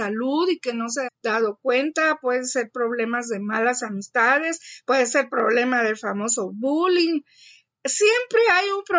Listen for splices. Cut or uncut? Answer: cut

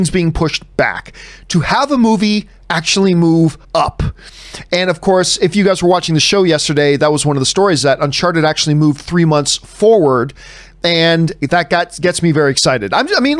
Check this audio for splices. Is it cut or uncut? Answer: cut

